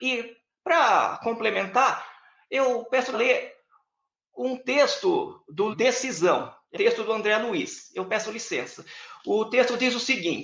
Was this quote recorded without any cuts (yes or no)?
no